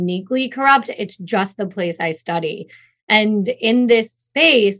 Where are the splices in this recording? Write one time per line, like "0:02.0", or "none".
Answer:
none